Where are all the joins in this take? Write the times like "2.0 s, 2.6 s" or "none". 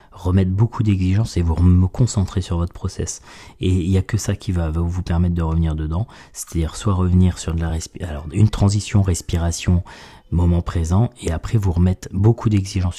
none